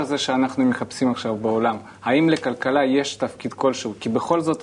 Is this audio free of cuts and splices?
yes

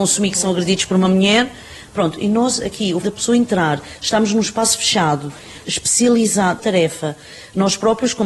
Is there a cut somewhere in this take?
yes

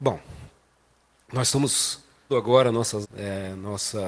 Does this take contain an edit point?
yes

